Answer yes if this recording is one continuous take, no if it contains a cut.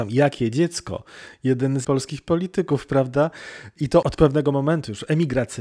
no